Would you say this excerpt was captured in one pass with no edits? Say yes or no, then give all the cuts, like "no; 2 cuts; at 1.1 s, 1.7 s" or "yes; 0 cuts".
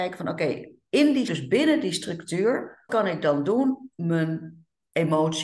no; 3 cuts; at 1.3 s, 2.9 s, 4.0 s